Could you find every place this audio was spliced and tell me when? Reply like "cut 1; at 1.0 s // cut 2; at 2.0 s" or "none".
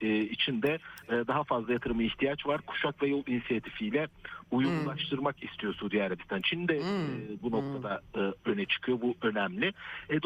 none